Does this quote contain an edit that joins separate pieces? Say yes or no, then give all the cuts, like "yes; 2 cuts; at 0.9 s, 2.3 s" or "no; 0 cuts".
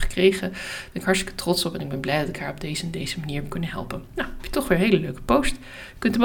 no; 0 cuts